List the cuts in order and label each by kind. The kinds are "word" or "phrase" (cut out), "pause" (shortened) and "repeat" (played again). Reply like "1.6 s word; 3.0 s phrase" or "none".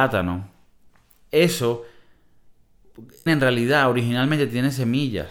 3.3 s word